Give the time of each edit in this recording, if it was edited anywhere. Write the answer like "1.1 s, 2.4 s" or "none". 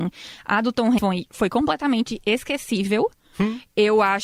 1.0 s